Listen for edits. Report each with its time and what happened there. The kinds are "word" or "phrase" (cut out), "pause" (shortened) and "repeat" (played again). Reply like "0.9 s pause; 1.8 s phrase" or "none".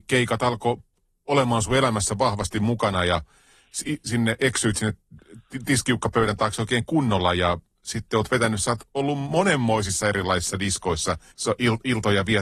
11.3 s pause